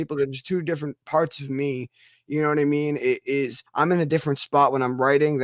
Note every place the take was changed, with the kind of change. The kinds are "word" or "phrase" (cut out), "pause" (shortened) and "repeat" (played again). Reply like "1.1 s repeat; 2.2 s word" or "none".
3.7 s pause

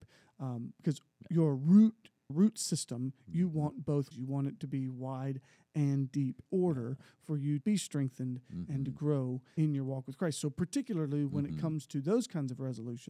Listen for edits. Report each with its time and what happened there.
2.3 s word; 4.1 s word; 6.5 s word; 7.6 s word; 9.6 s word

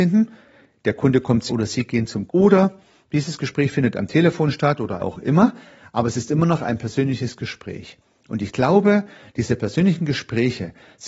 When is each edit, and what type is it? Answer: 1.5 s word; 2.3 s word; 5.0 s phrase

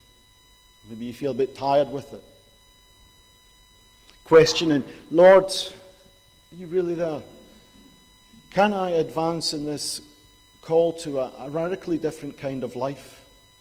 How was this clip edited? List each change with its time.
none

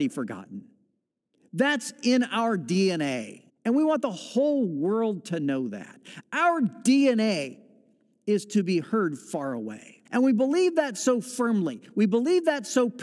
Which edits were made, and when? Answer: 3.5 s pause; 10.0 s pause

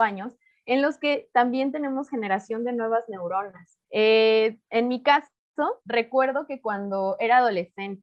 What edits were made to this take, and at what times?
3.8 s pause; 5.8 s pause

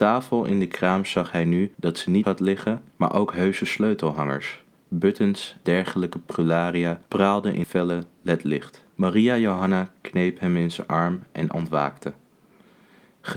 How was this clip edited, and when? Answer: 1.7 s pause; 2.2 s phrase; 2.9 s pause; 5.7 s word; 7.1 s pause; 7.6 s word; 8.9 s pause; 11.5 s word

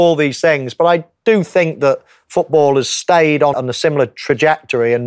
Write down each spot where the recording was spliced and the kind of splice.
3.5 s word

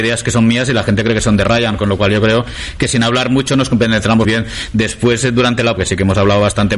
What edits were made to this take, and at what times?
4.2 s word; 5.8 s word

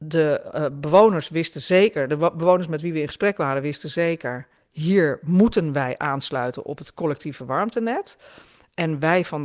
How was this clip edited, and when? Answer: none

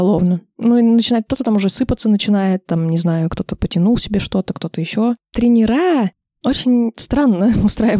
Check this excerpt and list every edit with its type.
none

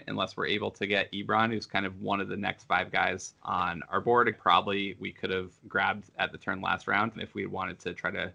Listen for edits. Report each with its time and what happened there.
3.4 s pause; 4.3 s word; 5.6 s pause; 7.1 s word

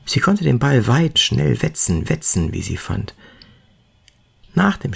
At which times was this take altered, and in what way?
1.1 s phrase; 2.0 s repeat

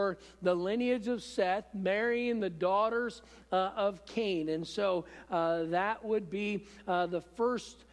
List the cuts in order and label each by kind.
none

